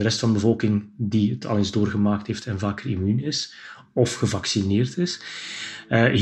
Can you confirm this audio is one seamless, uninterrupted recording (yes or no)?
yes